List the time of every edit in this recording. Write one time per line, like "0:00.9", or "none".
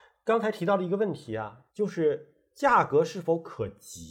0:01.7